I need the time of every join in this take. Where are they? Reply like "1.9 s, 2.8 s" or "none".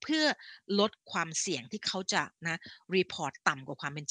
1.0 s, 2.4 s